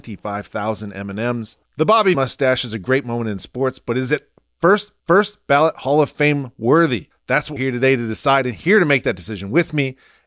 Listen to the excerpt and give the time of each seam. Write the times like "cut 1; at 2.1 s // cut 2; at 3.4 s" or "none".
cut 1; at 1.7 s // cut 2; at 2.1 s // cut 3; at 5.0 s // cut 4; at 7.1 s // cut 5; at 7.6 s